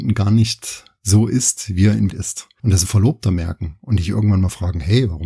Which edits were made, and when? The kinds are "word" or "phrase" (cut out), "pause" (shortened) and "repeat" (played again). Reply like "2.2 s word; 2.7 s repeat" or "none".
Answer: 2.1 s word; 2.8 s phrase